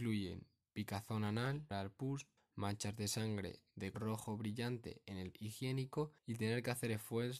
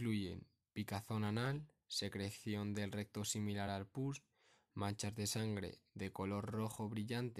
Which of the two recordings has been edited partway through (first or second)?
first